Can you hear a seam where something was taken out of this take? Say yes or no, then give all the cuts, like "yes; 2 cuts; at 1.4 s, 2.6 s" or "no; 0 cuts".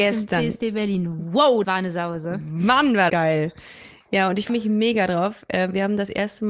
yes; 3 cuts; at 1.6 s, 3.1 s, 4.5 s